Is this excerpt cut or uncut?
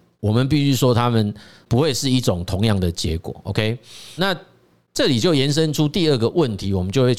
cut